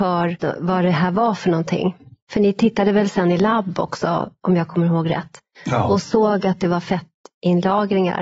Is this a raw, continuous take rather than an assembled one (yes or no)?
yes